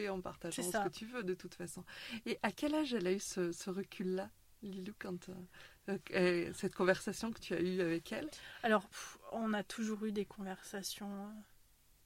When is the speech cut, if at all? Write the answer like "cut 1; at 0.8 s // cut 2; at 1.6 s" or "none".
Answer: none